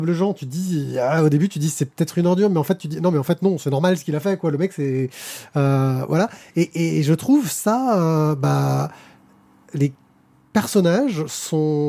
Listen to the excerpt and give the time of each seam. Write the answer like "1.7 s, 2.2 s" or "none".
none